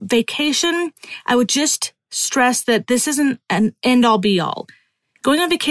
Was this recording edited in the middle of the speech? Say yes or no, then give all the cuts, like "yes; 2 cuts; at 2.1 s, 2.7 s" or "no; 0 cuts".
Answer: no; 0 cuts